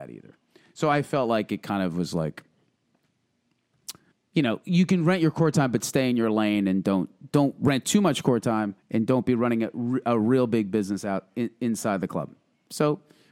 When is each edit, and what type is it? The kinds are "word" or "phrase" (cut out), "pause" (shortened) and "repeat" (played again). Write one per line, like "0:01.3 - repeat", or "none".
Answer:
0:04.1 - pause
0:08.8 - pause